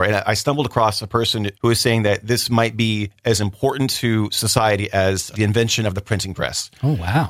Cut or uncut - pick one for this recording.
cut